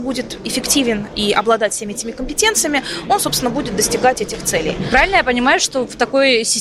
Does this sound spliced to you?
no; 0 cuts

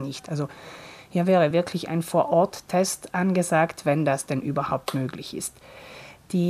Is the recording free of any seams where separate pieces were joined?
yes; 0 cuts

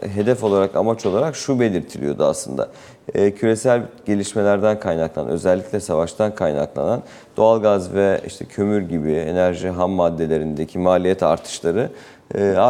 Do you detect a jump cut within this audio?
no; 0 cuts

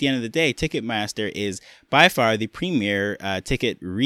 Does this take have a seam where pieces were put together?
no; 0 cuts

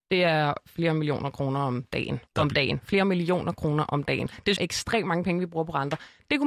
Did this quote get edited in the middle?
yes; 2 cuts; at 2.3 s, 4.6 s

